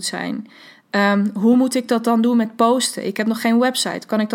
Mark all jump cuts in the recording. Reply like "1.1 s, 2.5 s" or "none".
none